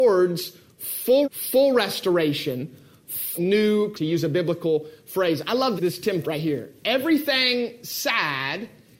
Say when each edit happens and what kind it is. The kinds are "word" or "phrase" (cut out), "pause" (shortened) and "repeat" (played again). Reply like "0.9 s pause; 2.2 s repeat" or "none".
1.2 s word; 3.3 s word; 3.9 s word; 5.8 s word; 6.2 s phrase